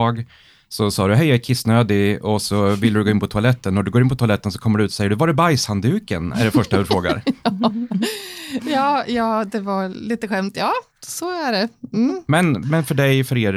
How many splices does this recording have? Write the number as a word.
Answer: zero